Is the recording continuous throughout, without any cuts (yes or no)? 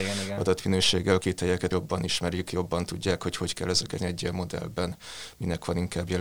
no